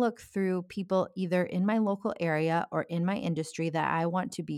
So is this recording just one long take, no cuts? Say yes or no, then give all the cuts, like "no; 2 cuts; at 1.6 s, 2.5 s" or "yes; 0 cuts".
yes; 0 cuts